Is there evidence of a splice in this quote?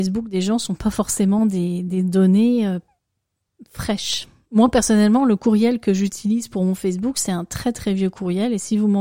no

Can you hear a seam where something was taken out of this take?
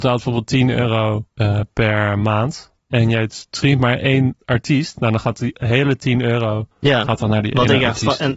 yes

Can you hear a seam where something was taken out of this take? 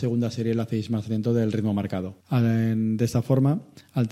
yes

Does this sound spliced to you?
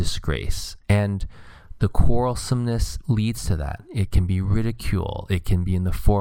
no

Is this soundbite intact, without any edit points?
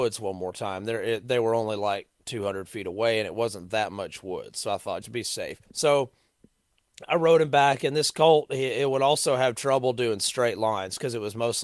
no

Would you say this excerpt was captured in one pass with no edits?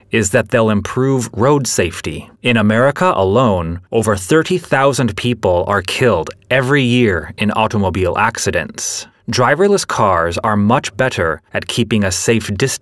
no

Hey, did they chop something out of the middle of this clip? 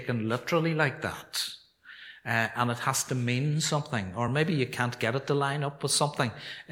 no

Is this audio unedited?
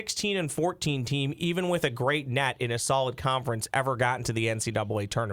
yes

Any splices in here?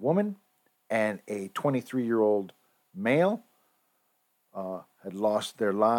no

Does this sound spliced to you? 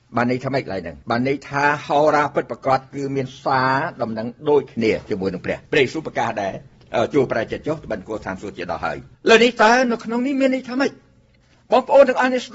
yes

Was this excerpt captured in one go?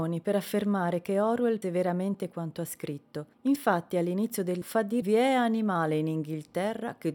no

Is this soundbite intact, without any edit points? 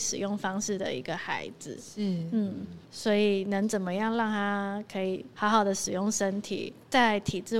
no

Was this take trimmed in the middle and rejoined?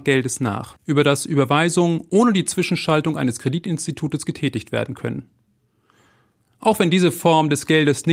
no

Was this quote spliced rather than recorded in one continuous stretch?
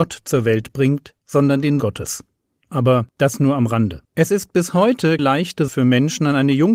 yes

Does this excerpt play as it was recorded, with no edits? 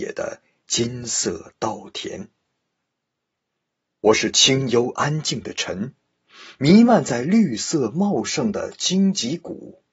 yes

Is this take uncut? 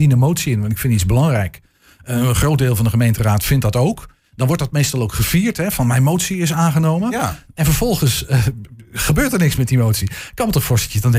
yes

